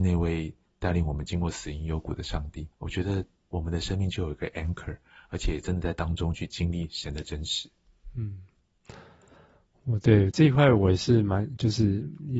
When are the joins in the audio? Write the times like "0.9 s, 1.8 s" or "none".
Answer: 2.7 s

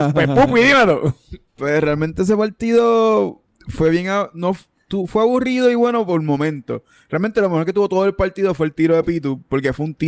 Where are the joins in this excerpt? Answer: none

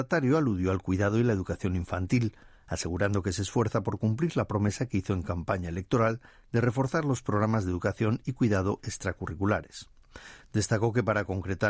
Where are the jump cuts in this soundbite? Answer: none

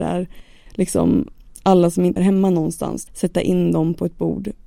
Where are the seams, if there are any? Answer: 2.2 s, 3.1 s

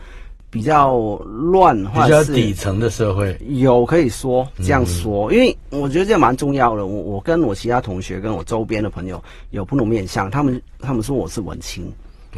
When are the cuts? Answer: none

